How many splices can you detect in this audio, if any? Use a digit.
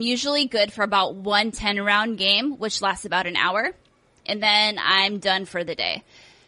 0